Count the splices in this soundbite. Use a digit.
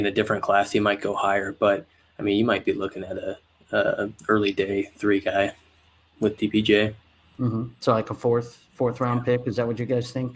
0